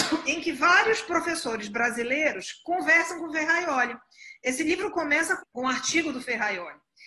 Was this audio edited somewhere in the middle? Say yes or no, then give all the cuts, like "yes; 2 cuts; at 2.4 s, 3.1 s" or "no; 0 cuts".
yes; 1 cut; at 5.4 s